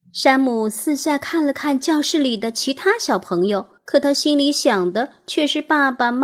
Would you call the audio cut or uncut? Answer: cut